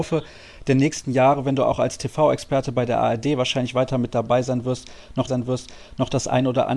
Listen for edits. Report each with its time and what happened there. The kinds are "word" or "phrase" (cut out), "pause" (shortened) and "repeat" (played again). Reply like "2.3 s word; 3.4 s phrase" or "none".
5.3 s repeat

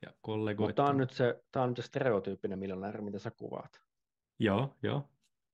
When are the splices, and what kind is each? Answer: none

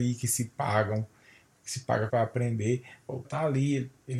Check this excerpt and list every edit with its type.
2.1 s word; 3.2 s word

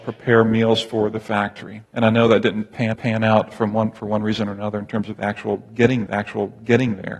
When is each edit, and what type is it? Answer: 1.9 s pause; 2.9 s repeat; 6.1 s repeat

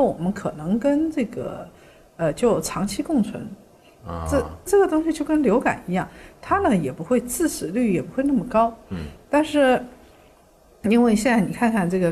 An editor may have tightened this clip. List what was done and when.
none

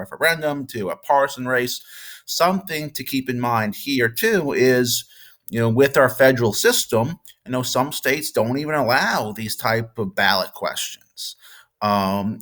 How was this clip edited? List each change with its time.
none

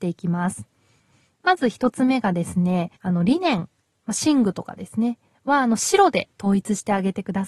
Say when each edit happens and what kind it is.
3.0 s pause

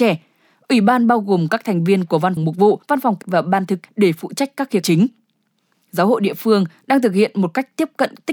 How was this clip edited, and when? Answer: 2.4 s word; 2.8 s pause; 3.2 s word; 3.8 s word; 4.8 s phrase

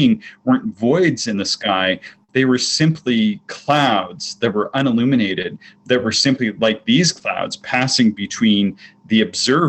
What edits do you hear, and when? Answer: none

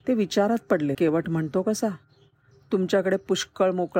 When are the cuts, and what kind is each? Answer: 0.9 s word; 2.5 s word

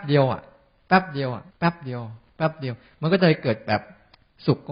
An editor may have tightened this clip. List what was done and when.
1.5 s pause

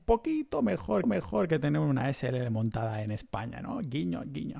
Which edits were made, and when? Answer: 1.0 s repeat

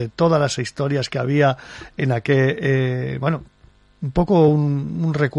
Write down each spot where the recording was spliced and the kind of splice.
none

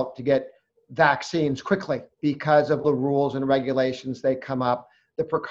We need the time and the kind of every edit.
2.1 s pause; 2.8 s word

